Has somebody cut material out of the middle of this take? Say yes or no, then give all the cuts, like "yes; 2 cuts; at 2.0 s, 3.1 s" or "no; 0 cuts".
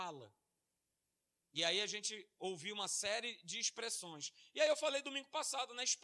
no; 0 cuts